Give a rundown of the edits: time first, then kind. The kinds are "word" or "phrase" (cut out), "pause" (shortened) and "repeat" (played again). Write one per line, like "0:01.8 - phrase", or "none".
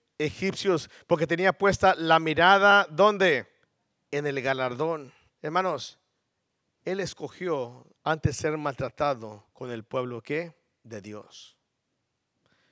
0:03.6 - pause
0:05.3 - pause
0:07.9 - pause
0:09.5 - pause